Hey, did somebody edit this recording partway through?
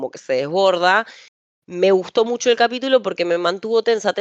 no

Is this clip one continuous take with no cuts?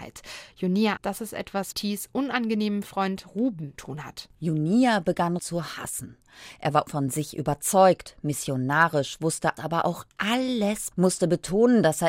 no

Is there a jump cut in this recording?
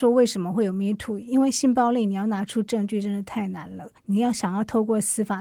yes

